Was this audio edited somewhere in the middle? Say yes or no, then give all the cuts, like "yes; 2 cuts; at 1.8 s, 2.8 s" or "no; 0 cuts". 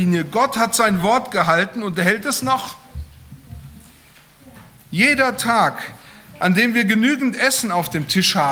no; 0 cuts